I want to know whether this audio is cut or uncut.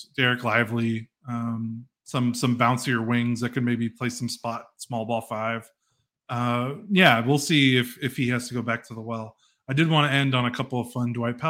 uncut